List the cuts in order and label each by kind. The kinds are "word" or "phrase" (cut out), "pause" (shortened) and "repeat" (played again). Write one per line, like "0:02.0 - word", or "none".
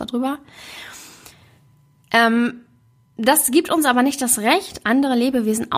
none